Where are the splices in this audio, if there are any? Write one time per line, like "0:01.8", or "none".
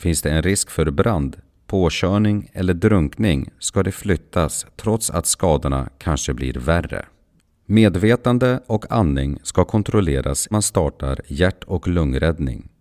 0:10.5